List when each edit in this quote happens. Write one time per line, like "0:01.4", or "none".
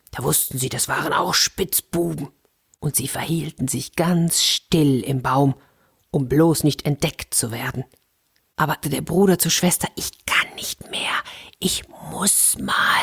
0:08.8